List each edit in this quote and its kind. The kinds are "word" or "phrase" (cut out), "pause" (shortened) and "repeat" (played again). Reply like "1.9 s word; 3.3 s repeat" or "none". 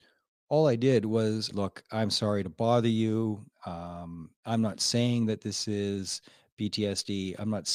1.5 s phrase; 4.4 s pause